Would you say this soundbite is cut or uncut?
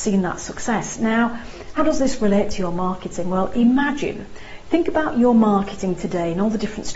cut